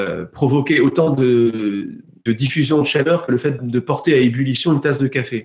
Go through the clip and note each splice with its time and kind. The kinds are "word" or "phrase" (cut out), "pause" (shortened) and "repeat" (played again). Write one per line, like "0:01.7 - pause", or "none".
0:02.3 - word
0:03.6 - word